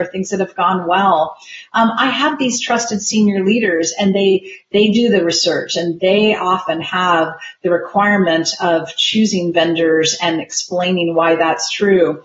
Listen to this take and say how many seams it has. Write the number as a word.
zero